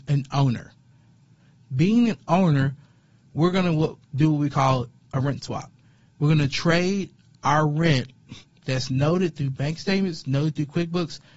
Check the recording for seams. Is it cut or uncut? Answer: uncut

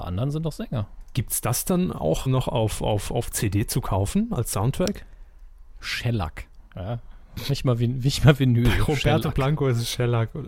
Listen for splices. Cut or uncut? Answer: cut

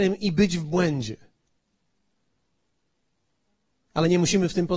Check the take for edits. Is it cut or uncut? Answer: uncut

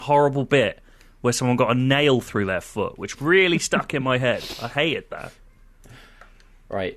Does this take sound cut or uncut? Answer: uncut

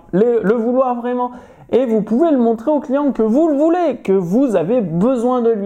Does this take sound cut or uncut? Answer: uncut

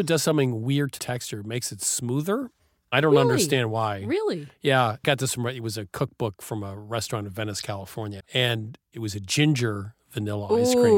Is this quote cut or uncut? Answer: cut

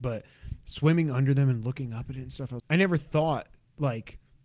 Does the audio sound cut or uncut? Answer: cut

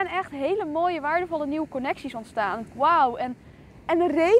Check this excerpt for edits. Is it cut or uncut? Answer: cut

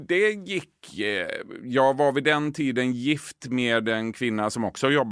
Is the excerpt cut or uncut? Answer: uncut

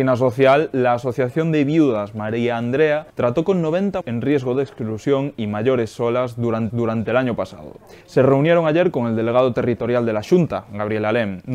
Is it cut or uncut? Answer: cut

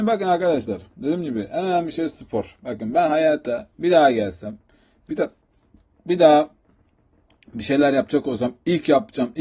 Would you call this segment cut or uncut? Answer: uncut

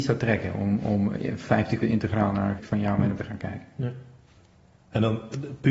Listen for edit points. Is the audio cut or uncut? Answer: cut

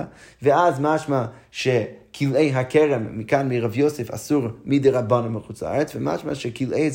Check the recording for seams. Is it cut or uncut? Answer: uncut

